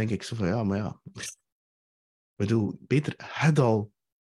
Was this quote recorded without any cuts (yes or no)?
yes